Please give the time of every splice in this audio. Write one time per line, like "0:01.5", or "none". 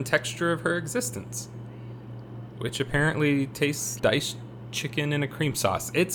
0:04.0